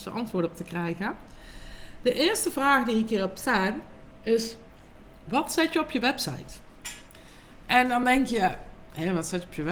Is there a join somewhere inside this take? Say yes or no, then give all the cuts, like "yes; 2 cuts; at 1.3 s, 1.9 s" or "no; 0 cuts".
no; 0 cuts